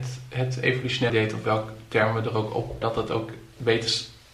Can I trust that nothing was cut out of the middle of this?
no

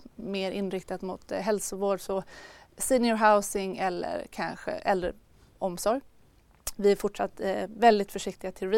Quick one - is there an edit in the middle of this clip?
no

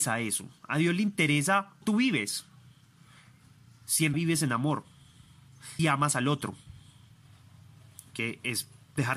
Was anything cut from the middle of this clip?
yes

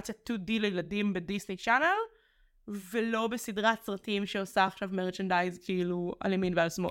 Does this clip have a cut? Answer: no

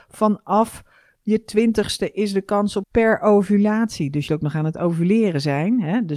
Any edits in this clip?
yes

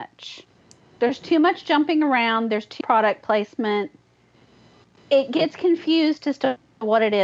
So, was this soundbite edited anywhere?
yes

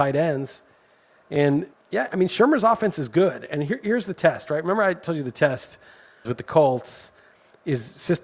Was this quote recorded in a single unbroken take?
no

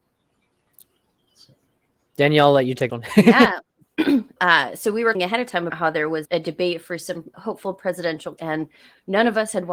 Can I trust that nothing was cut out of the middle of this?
no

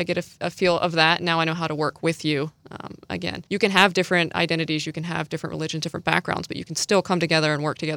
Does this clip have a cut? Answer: yes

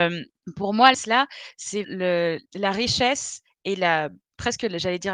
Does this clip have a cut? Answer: yes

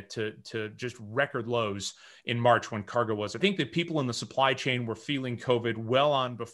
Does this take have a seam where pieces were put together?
yes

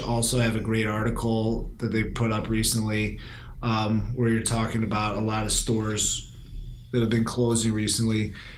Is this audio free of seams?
yes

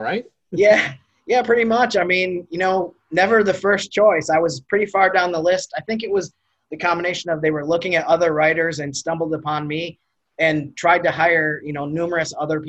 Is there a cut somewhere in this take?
no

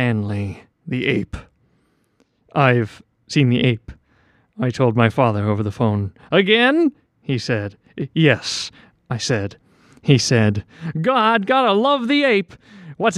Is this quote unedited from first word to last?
yes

